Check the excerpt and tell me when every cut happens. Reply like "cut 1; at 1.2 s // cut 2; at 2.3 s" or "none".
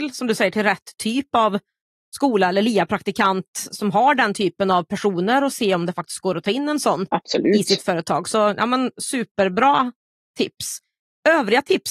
none